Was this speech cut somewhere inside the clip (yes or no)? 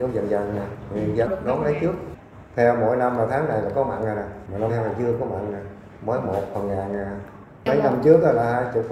yes